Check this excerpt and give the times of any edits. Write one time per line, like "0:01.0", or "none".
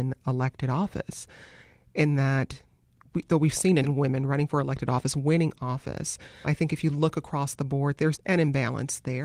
0:03.8
0:06.4
0:08.1